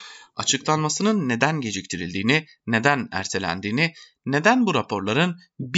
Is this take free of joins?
yes; 0 cuts

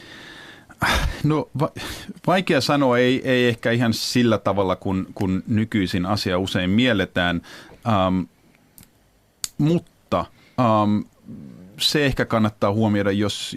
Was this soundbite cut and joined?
no; 0 cuts

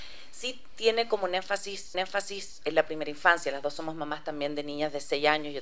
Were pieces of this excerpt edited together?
yes; 1 cut; at 1.9 s

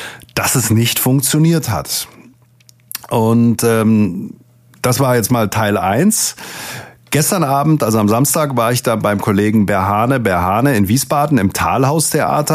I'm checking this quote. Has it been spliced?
no; 0 cuts

